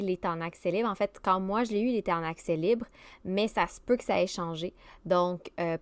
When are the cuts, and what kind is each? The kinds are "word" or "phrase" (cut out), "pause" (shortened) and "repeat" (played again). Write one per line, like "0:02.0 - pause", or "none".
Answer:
none